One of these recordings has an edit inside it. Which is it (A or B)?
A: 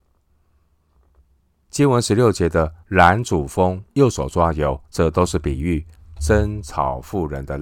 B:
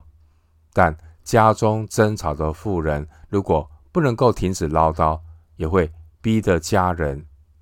A